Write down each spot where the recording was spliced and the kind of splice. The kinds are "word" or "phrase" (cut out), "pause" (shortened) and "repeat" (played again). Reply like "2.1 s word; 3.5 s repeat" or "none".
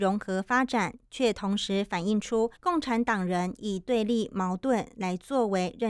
2.6 s pause